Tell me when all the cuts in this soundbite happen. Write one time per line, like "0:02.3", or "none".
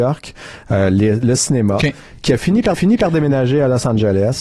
0:02.7